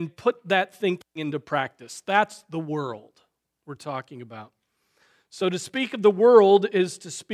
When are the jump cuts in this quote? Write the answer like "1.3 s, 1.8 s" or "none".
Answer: none